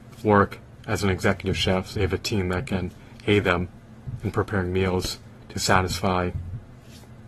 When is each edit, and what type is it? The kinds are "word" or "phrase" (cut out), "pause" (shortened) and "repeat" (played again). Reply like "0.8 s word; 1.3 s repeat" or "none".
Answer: 1.9 s word